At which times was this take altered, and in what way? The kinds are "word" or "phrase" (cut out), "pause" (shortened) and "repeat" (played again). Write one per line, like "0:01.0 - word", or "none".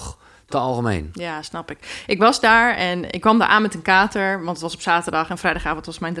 none